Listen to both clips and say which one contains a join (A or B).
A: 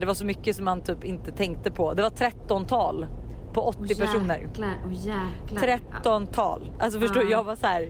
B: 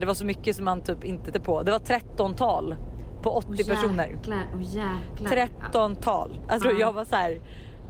B